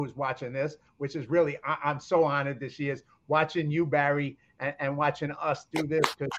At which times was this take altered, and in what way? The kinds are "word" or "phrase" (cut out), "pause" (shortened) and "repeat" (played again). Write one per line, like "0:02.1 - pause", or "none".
none